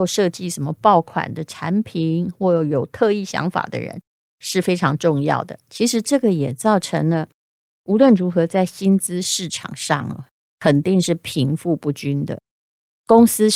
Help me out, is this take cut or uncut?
uncut